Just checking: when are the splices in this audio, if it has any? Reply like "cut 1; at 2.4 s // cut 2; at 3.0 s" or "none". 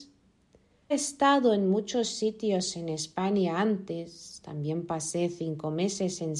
cut 1; at 0.9 s